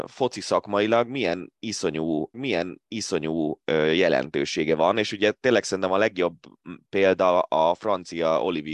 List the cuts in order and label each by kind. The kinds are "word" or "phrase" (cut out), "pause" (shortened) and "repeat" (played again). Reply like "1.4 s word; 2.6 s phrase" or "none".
2.3 s repeat